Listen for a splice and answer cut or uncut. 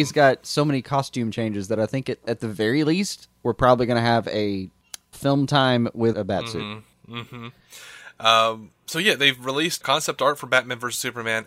cut